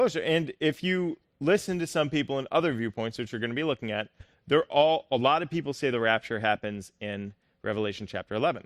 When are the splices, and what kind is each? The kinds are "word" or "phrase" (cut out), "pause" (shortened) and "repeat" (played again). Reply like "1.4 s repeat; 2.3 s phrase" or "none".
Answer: none